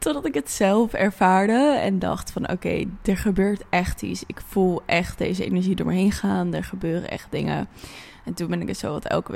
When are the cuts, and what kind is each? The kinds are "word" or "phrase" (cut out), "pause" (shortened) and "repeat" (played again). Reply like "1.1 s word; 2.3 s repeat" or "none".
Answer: none

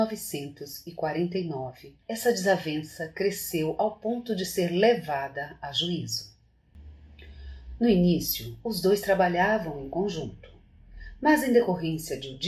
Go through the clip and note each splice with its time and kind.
2.0 s pause

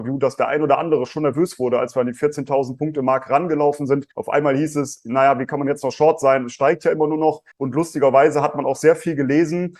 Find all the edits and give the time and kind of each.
4.1 s pause; 7.5 s pause

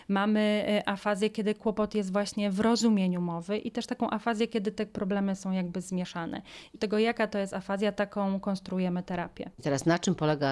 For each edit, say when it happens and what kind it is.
6.7 s phrase; 9.5 s pause

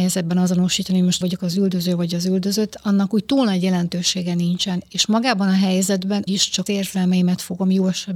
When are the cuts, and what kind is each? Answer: 1.2 s word; 6.3 s word; 6.7 s word

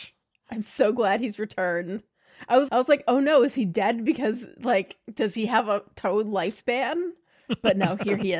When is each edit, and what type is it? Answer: 2.7 s word

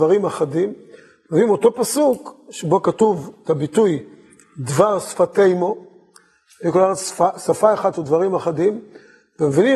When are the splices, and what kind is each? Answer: none

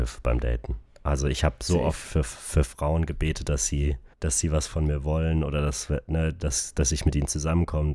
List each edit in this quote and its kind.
4.1 s pause

